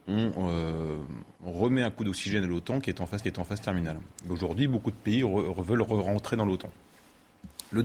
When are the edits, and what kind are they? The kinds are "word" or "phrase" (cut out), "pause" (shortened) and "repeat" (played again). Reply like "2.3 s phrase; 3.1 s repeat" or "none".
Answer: 1.4 s pause; 3.2 s repeat